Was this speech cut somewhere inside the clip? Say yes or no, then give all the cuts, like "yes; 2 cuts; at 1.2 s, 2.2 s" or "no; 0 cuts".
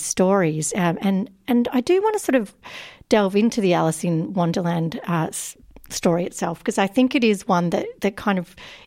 no; 0 cuts